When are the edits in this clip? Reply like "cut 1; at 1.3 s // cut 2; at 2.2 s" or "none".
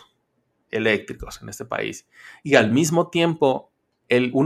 none

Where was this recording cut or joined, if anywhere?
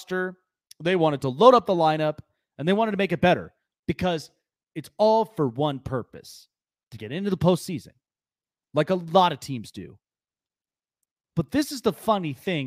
none

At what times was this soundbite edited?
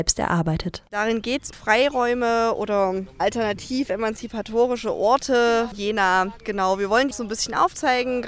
cut 1; at 1.5 s // cut 2; at 5.7 s // cut 3; at 7.1 s

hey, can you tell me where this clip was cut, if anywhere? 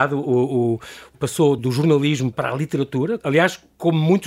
cut 1; at 1.1 s // cut 2; at 1.6 s // cut 3; at 2.3 s // cut 4; at 3.2 s

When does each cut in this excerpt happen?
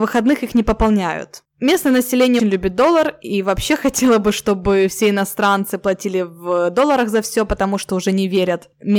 cut 1; at 2.4 s

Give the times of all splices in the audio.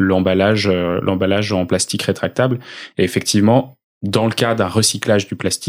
none

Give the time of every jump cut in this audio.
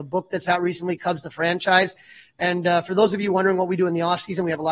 none

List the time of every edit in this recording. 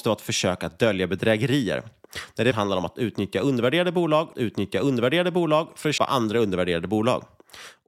cut 1; at 2.5 s // cut 2; at 4.3 s // cut 3; at 6.0 s

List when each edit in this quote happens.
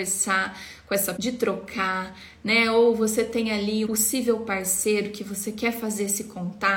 cut 1; at 1.2 s // cut 2; at 3.9 s

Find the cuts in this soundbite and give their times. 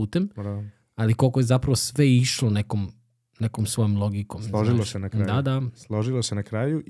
none

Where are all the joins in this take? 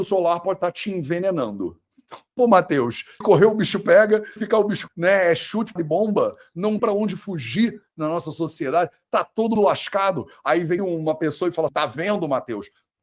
cut 1; at 2.3 s // cut 2; at 3.2 s // cut 3; at 4.4 s // cut 4; at 4.9 s // cut 5; at 5.8 s // cut 6; at 6.8 s // cut 7; at 9.6 s // cut 8; at 10.8 s // cut 9; at 11.7 s

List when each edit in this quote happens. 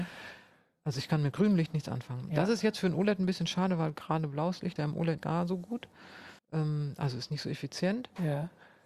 cut 1; at 4.8 s // cut 2; at 5.2 s // cut 3; at 6.4 s

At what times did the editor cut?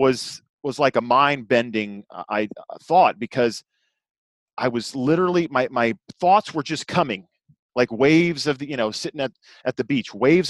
none

